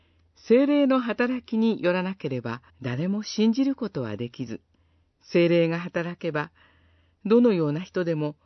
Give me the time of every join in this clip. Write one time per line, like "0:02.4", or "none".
0:02.7
0:04.7

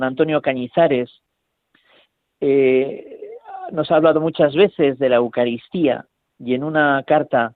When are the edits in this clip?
none

